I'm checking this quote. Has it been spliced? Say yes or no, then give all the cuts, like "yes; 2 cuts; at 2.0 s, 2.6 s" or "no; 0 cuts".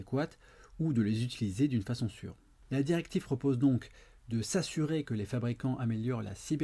no; 0 cuts